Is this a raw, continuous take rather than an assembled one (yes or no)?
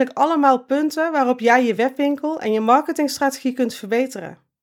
yes